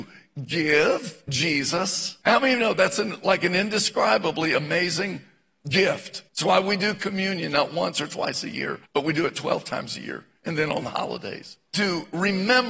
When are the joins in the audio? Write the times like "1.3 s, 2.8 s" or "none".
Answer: 2.2 s, 6.3 s, 8.9 s, 11.7 s